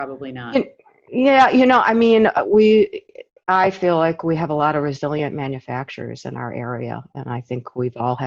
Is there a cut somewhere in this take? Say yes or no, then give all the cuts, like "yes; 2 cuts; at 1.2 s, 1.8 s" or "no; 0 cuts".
no; 0 cuts